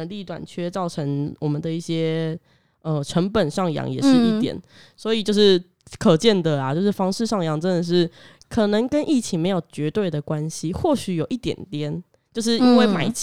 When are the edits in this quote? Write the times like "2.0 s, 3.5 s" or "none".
none